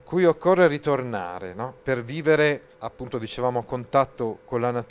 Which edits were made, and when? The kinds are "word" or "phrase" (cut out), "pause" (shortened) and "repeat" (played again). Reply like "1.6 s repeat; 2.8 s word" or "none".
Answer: 1.8 s pause; 2.7 s pause